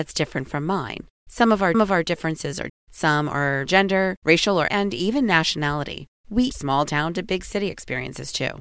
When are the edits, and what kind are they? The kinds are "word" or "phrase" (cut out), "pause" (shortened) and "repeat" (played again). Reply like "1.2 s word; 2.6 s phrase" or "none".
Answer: 1.1 s pause; 1.7 s repeat; 2.7 s word; 3.7 s phrase; 4.7 s phrase; 6.5 s word